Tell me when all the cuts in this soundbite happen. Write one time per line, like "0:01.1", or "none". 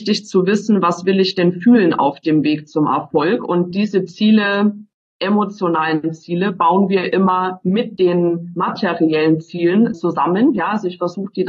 0:09.9